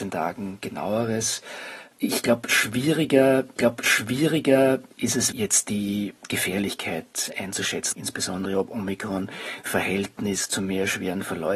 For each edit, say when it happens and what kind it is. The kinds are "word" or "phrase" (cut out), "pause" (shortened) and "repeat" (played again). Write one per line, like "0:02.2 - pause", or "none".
0:03.6 - repeat
0:05.3 - word
0:06.2 - pause
0:07.9 - word
0:09.7 - word